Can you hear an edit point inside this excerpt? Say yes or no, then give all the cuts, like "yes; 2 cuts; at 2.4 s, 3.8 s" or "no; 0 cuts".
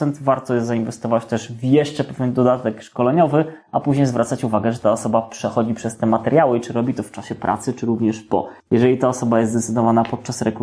yes; 1 cut; at 8.6 s